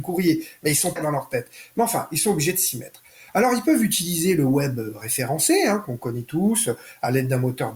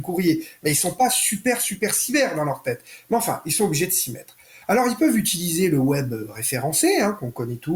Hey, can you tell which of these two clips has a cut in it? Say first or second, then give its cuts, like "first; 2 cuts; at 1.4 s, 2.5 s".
first; 1 cut; at 1.0 s